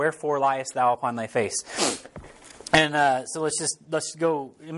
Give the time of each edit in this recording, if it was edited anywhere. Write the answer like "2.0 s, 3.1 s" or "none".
none

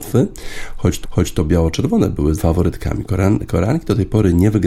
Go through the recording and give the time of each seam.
1.0 s, 2.4 s

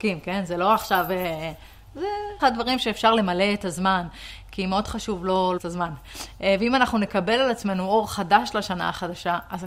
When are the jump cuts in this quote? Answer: 2.4 s, 5.6 s

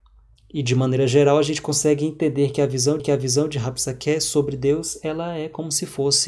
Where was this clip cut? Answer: 3.0 s

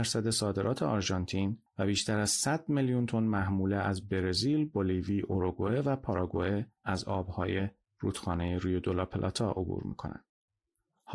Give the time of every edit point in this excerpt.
6.8 s

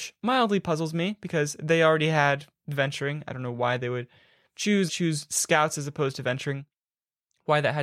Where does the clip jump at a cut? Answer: 4.9 s

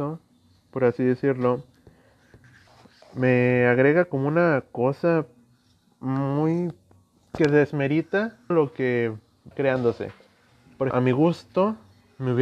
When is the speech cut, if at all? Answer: 8.5 s, 9.5 s, 10.9 s

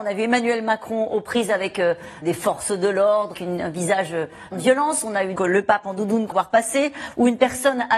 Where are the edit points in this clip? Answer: 2.2 s, 3.3 s, 4.5 s, 5.4 s, 6.3 s

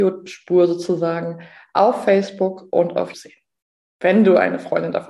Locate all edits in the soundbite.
3.1 s

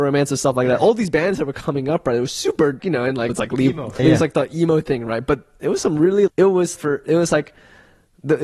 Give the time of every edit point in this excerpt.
2.8 s, 3.3 s, 4.0 s, 6.3 s, 6.8 s

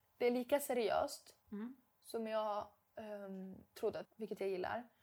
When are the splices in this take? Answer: 1.4 s, 3.7 s, 4.0 s

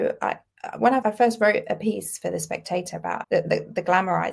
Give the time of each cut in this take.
1.0 s, 3.2 s

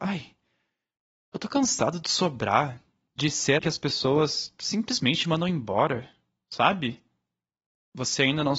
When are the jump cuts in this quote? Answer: 3.6 s

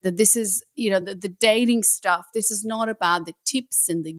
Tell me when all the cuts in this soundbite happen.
none

